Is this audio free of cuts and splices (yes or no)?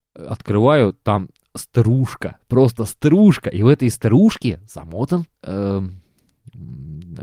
no